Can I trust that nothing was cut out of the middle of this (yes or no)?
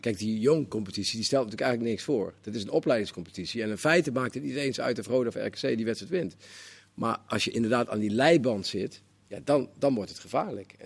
yes